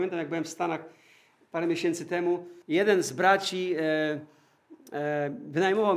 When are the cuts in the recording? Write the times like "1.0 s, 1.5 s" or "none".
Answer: 2.6 s